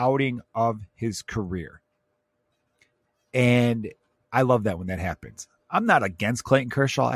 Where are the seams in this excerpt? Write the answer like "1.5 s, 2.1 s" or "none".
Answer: none